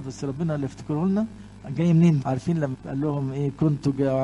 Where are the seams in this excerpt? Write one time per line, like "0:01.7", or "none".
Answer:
0:02.2
0:02.7